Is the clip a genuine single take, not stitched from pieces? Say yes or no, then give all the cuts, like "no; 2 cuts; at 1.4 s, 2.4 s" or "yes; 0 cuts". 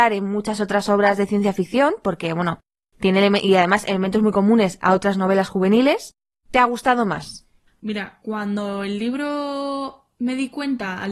yes; 0 cuts